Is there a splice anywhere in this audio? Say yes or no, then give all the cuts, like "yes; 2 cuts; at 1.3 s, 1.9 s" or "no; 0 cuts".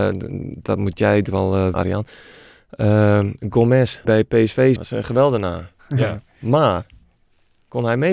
yes; 4 cuts; at 1.3 s, 1.7 s, 4.0 s, 4.8 s